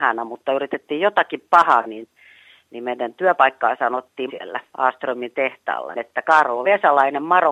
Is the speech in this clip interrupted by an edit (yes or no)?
yes